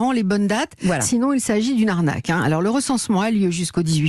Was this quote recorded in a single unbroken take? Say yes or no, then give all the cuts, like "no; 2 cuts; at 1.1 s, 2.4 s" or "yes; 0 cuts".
yes; 0 cuts